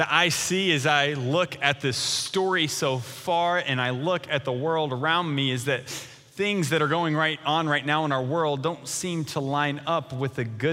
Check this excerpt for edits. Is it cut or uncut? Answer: uncut